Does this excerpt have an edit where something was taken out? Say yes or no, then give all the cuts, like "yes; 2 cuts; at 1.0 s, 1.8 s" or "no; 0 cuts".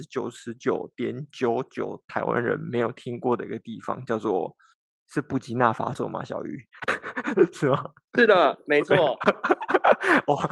yes; 1 cut; at 4.7 s